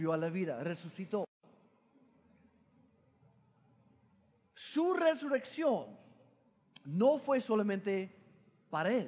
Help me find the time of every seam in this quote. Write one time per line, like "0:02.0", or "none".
none